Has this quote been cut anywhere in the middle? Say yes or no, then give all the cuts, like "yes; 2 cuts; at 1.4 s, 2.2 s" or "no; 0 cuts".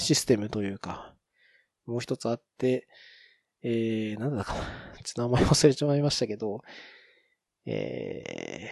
no; 0 cuts